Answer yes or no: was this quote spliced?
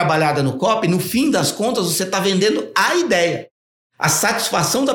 no